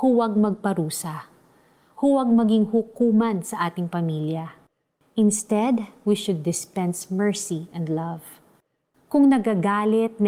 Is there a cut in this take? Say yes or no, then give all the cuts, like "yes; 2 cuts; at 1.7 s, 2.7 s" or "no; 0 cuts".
no; 0 cuts